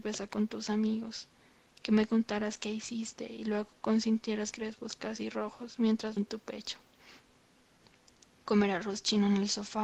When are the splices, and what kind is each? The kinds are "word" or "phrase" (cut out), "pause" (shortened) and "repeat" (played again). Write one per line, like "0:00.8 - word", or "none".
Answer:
0:04.5 - word
0:06.2 - word